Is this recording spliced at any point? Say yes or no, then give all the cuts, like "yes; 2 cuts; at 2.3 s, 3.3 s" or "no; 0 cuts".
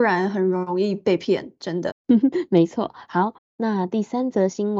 no; 0 cuts